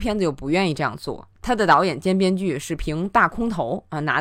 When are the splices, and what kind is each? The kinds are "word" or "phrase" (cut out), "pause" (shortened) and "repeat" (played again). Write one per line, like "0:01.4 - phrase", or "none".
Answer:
0:01.3 - pause